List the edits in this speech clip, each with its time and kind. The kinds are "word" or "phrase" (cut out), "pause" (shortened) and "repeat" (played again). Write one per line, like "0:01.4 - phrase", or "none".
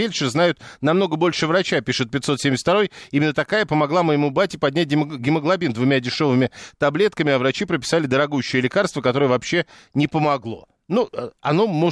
none